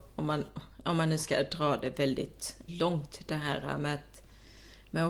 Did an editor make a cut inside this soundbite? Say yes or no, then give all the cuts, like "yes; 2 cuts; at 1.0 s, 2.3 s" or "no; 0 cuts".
yes; 1 cut; at 2.7 s